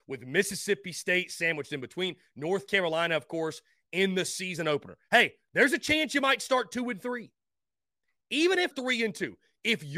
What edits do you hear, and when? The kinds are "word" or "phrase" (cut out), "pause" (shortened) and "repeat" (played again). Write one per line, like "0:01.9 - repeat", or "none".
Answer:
0:08.7 - word